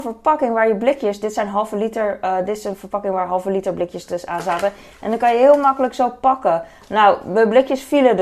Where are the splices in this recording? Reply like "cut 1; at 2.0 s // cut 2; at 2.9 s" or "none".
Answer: none